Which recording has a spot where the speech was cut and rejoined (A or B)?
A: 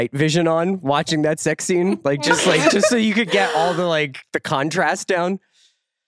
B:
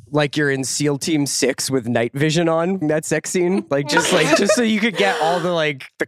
B